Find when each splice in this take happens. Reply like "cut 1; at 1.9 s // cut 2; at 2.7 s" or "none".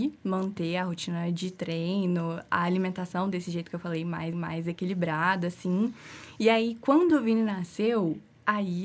cut 1; at 4.3 s